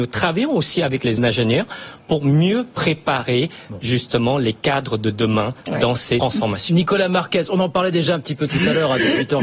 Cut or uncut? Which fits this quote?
cut